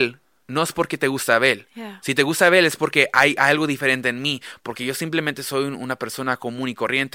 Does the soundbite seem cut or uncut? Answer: uncut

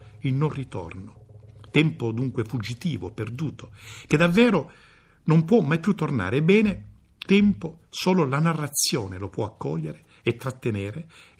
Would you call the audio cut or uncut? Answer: cut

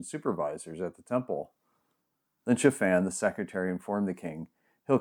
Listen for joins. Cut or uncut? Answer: uncut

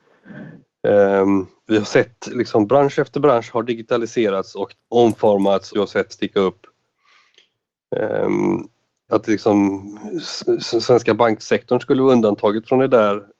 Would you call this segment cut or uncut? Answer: cut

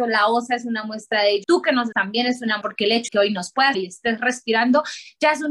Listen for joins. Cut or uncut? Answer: cut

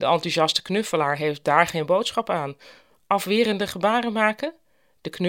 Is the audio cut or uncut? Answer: uncut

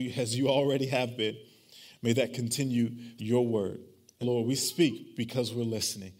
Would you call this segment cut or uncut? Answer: cut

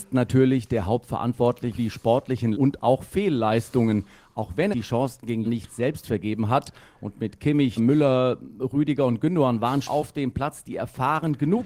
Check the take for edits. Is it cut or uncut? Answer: cut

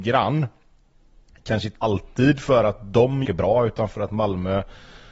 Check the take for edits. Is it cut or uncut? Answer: cut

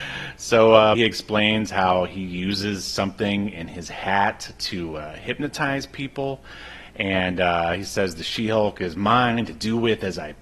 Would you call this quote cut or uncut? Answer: cut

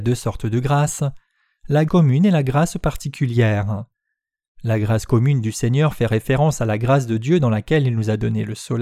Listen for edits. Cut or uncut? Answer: cut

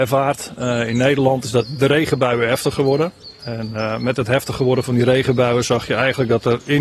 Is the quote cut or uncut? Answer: uncut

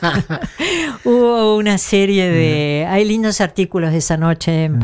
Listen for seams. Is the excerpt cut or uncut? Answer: uncut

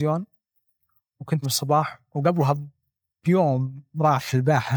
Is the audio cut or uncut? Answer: cut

